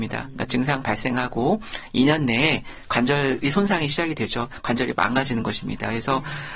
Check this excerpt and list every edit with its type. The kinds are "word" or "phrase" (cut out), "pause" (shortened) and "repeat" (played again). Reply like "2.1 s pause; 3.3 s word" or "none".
none